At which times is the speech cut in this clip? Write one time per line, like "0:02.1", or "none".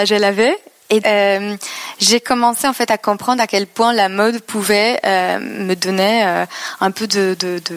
0:01.0

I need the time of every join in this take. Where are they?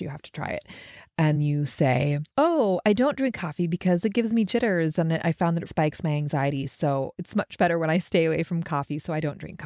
0:01.4
0:02.3
0:05.7
0:07.1

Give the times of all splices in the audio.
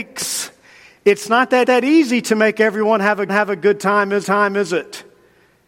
0:01.6
0:03.3
0:04.2

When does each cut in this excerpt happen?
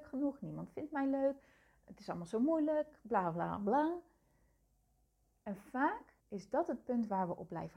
0:06.2

